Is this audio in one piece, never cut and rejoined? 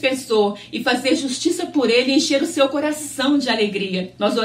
yes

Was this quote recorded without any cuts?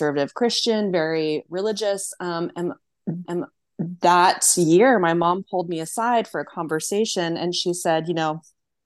no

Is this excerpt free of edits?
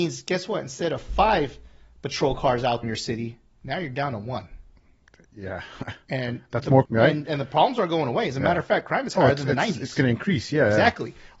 no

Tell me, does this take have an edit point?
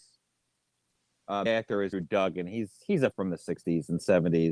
yes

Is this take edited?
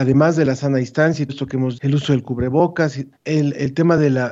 yes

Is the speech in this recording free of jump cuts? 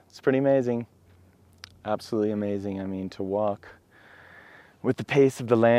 yes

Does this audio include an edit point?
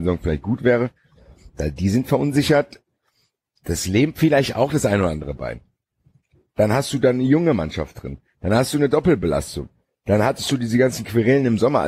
no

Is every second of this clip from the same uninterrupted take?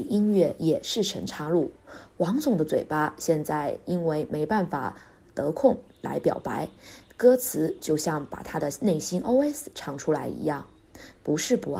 yes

